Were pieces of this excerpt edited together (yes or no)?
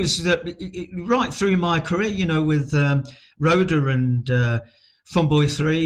no